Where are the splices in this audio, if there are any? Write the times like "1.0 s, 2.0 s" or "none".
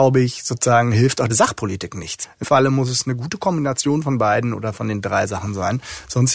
1.3 s, 2.4 s